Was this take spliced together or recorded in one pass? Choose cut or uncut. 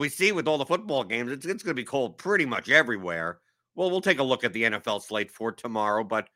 uncut